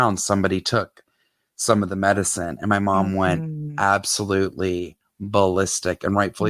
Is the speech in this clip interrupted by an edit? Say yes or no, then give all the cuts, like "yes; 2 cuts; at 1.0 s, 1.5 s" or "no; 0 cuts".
no; 0 cuts